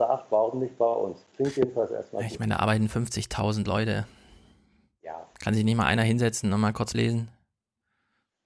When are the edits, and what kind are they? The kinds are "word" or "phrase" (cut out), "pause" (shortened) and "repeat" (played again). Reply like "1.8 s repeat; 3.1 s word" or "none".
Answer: 6.9 s word

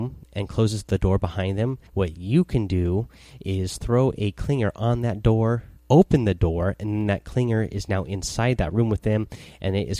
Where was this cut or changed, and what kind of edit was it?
1.9 s pause; 5.8 s pause

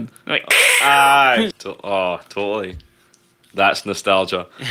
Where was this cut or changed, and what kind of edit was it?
1.5 s word

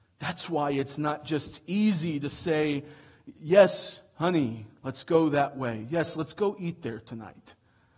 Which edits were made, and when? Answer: none

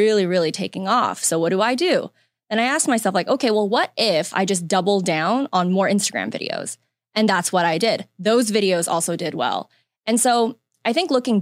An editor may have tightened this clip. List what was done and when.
none

